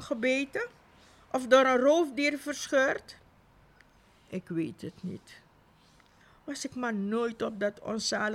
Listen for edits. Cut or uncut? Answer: uncut